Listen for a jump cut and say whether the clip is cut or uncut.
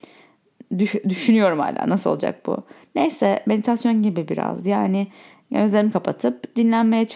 uncut